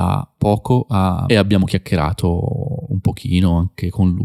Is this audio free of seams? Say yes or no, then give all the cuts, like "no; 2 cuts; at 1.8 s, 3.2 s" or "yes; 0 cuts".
no; 1 cut; at 1.3 s